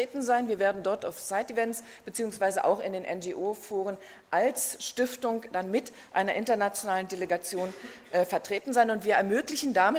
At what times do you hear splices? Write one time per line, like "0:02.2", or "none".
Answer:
none